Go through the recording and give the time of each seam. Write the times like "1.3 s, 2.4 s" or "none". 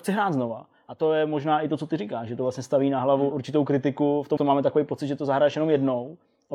3.3 s, 4.4 s